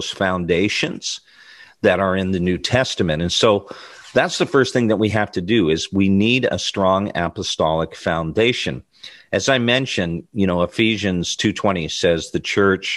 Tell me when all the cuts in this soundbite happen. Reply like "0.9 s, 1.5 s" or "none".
none